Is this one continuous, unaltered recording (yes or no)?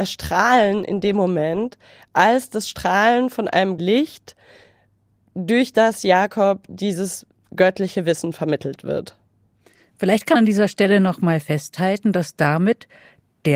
no